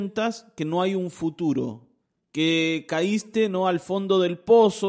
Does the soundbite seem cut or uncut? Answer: cut